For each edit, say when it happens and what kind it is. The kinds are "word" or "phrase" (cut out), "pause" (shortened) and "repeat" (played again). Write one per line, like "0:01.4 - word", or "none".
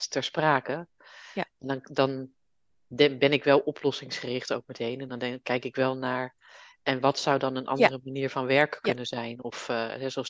none